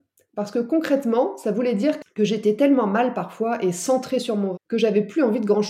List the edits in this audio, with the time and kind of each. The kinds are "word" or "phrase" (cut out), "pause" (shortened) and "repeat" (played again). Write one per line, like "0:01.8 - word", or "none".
0:04.5 - word